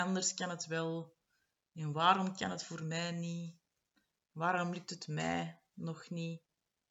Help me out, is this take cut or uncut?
uncut